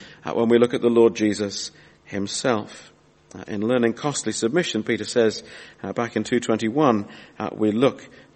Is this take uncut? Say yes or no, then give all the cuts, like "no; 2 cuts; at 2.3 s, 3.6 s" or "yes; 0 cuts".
yes; 0 cuts